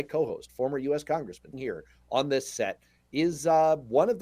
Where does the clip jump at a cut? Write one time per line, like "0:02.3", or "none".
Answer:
0:01.5